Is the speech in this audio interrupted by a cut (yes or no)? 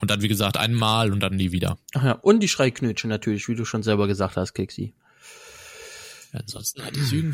yes